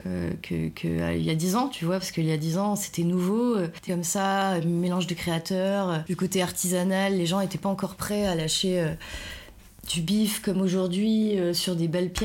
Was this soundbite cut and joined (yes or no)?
yes